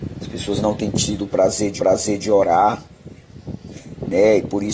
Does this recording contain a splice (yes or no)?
yes